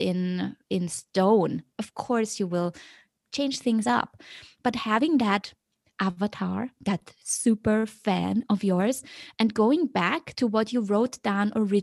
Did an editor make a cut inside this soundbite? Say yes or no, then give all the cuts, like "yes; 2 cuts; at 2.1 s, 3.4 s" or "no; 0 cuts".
no; 0 cuts